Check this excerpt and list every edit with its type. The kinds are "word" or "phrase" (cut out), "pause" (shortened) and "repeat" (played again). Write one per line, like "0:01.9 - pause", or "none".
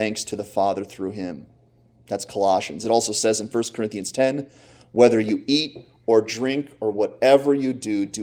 none